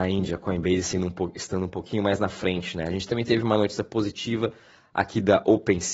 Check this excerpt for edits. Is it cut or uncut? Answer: uncut